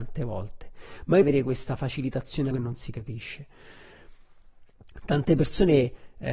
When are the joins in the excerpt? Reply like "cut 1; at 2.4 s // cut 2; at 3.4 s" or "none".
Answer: cut 1; at 1.2 s // cut 2; at 2.5 s